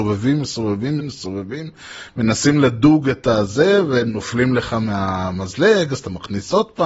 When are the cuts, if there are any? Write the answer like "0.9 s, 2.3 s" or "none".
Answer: 1.0 s